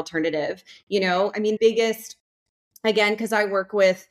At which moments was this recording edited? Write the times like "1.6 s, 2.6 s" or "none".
1.6 s